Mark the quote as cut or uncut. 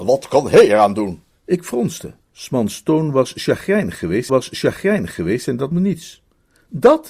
cut